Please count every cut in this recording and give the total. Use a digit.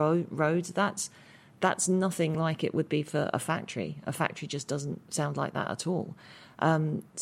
0